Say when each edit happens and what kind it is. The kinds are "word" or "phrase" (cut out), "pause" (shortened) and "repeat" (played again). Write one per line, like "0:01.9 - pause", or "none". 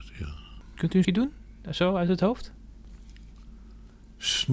0:01.0 - word